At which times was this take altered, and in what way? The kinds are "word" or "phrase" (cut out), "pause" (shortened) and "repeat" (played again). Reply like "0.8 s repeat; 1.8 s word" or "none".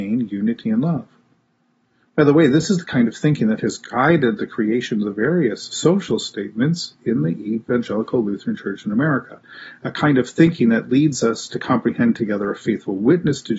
none